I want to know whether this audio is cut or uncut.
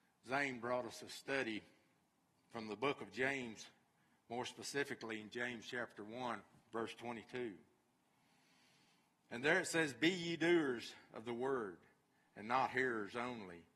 uncut